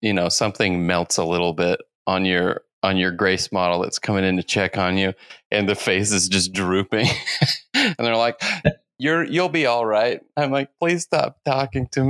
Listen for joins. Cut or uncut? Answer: uncut